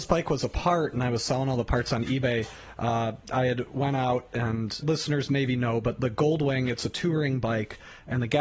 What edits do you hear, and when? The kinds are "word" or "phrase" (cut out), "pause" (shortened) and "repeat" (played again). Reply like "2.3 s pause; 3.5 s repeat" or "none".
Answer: 4.8 s phrase